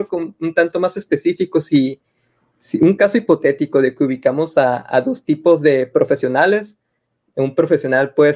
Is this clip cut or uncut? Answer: uncut